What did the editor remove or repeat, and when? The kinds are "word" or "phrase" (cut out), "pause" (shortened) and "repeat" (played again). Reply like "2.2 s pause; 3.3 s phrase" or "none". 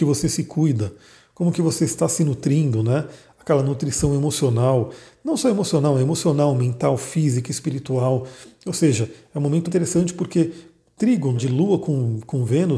9.6 s word; 11.3 s word

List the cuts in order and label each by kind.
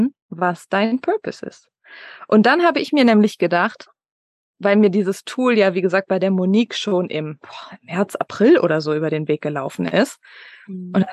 none

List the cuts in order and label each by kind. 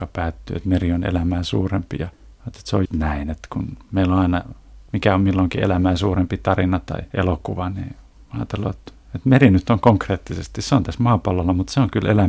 2.9 s word

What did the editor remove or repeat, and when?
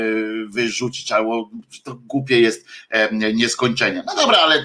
none

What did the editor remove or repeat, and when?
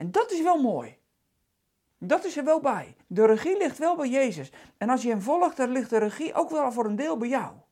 3.0 s pause

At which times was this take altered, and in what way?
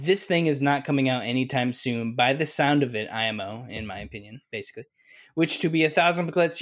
none

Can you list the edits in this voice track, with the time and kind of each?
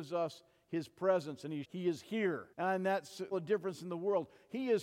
1.6 s phrase; 2.5 s pause; 3.3 s phrase

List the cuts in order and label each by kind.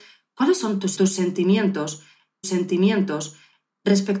1.0 s word; 2.4 s repeat

